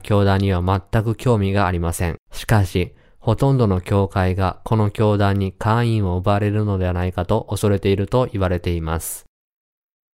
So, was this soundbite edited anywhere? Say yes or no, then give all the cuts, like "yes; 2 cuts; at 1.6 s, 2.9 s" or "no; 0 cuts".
yes; 1 cut; at 2.2 s